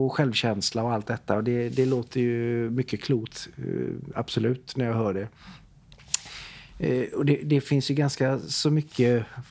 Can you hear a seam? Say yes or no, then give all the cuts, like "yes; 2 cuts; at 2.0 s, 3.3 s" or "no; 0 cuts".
no; 0 cuts